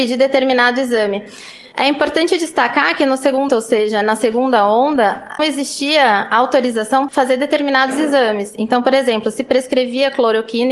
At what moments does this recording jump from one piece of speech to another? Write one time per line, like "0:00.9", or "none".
0:03.5
0:05.4
0:07.1